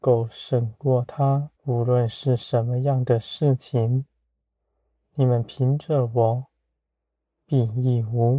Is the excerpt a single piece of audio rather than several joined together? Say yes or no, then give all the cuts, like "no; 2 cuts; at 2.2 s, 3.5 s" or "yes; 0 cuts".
no; 1 cut; at 1.6 s